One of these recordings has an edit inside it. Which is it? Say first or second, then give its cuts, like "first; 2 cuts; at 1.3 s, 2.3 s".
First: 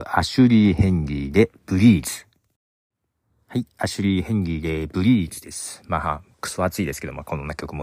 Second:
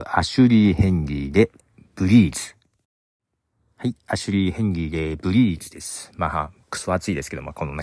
first; 1 cut; at 1.6 s